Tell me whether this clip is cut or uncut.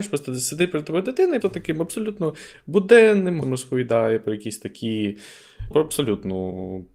cut